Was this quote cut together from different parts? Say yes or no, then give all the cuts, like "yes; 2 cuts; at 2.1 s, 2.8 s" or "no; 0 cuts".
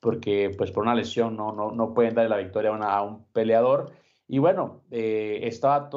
no; 0 cuts